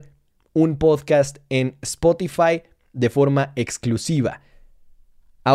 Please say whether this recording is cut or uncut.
uncut